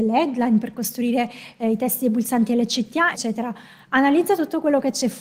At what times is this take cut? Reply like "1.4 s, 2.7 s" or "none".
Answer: 3.1 s